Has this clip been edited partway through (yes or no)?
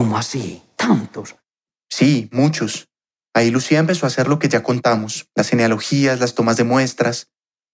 no